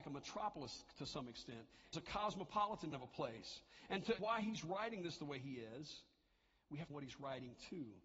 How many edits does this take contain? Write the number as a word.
four